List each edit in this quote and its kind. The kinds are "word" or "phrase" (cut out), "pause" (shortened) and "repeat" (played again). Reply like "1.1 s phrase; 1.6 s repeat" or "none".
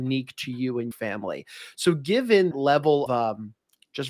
0.9 s word; 2.5 s word; 3.1 s word

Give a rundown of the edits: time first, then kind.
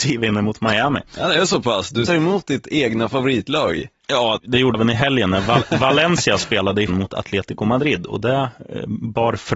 2.1 s word; 4.4 s word; 4.7 s word; 6.9 s word

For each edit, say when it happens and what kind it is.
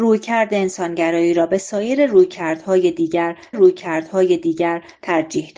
3.5 s repeat

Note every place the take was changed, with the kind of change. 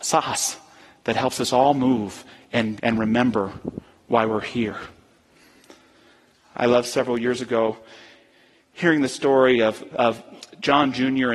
2.8 s word

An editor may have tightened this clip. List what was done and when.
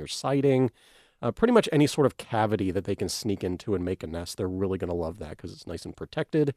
none

